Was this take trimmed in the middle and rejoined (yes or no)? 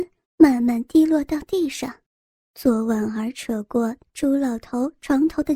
yes